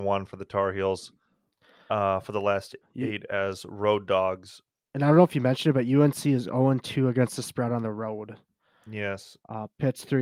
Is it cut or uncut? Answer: uncut